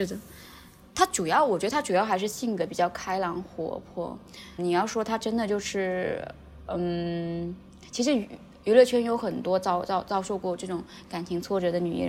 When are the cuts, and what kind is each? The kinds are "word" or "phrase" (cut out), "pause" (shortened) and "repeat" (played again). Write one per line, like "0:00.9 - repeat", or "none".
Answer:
0:04.6 - word